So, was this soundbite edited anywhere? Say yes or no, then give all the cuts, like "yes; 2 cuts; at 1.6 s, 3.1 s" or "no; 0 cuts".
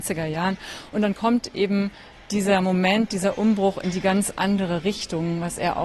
no; 0 cuts